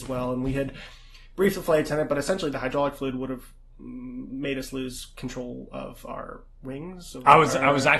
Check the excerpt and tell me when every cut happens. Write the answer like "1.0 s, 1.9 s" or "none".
none